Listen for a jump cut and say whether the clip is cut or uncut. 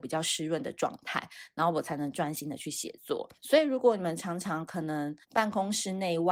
cut